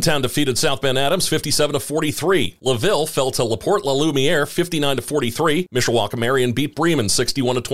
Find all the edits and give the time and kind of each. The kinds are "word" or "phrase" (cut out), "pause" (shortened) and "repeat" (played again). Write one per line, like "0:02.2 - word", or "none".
none